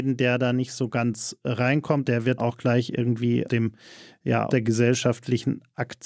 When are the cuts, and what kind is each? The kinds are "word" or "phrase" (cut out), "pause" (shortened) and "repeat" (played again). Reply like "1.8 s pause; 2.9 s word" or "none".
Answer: 2.0 s word; 2.4 s word; 3.5 s word; 4.5 s word